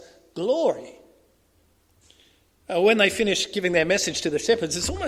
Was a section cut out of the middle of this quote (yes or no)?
no